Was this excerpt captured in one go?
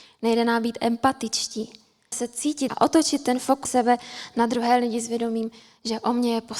no; 3 cuts; at 2.1 s, 2.7 s, 3.6 s

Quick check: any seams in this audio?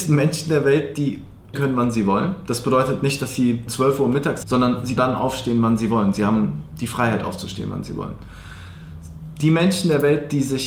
yes; 4 cuts; at 1.5 s, 3.7 s, 4.4 s, 5.0 s

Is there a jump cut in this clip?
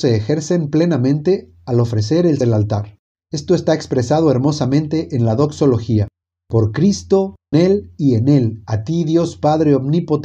yes; 2 cuts; at 2.4 s, 7.5 s

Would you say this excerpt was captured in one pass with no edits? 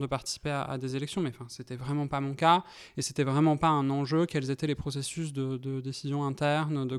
yes; 0 cuts

